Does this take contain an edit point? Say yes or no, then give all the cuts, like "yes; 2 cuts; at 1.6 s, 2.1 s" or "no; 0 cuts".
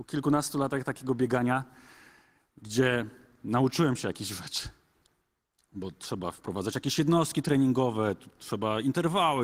no; 0 cuts